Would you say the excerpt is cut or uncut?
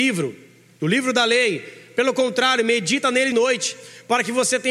cut